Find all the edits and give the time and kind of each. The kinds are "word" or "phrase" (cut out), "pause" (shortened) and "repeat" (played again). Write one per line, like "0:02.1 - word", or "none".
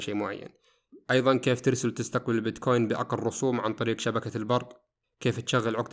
none